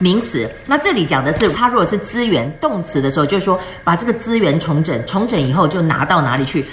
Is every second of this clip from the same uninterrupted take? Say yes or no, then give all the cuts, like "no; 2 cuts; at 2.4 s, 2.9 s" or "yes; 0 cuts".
no; 1 cut; at 1.5 s